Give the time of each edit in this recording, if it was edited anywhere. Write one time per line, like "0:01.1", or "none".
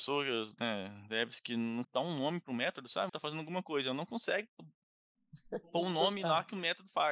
0:01.8
0:03.1